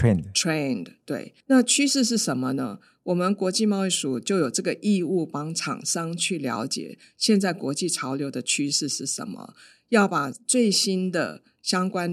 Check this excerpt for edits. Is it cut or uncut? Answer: cut